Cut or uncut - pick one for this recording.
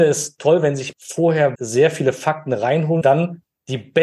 cut